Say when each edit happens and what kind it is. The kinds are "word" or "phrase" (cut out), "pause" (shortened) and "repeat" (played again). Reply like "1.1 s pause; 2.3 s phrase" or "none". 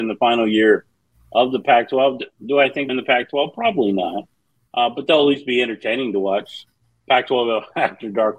2.9 s phrase